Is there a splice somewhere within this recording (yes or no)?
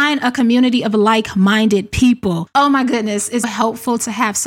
yes